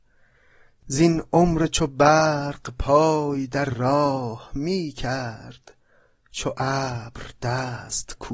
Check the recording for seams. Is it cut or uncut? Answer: uncut